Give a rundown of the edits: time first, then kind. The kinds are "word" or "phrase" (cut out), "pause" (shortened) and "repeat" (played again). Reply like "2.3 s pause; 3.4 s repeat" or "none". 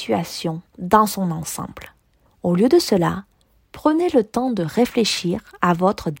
none

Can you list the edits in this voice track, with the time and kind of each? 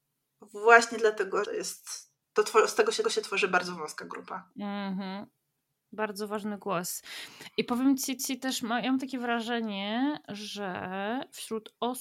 1.4 s phrase; 2.2 s pause; 3.0 s repeat; 8.2 s repeat

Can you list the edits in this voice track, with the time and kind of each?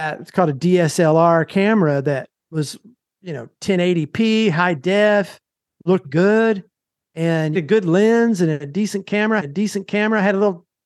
2.4 s pause; 6.0 s word; 7.5 s phrase; 9.4 s repeat

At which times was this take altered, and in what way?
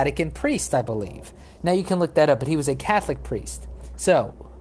none

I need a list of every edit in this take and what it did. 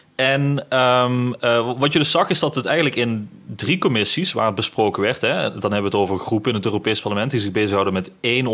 none

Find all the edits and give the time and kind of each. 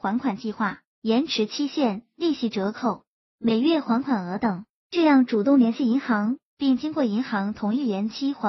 none

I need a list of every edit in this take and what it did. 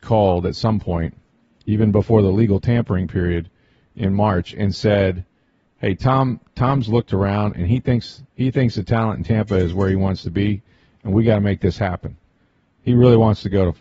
none

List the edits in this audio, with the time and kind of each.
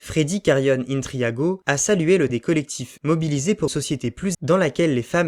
2.3 s word; 3.0 s word; 3.7 s word; 4.3 s word

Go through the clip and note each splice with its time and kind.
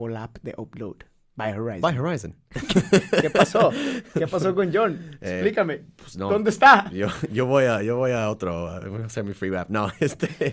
none

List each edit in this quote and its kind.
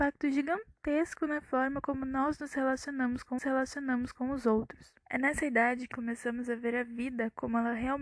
3.4 s repeat; 5.0 s pause; 5.9 s word

